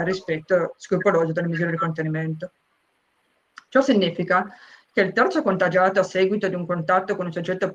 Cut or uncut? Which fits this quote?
uncut